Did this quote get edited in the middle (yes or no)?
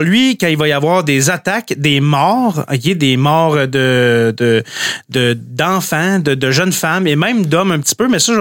no